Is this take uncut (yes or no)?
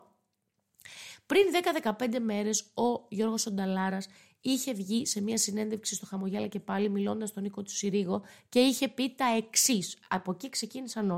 yes